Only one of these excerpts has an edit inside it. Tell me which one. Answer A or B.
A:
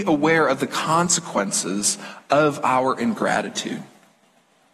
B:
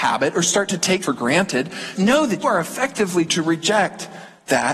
B